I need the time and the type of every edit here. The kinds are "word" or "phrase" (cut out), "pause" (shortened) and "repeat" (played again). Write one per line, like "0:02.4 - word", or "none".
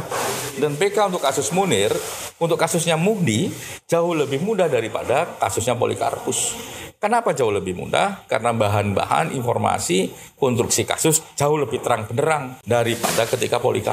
none